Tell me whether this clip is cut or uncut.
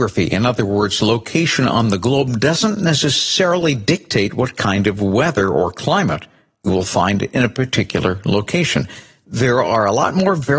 uncut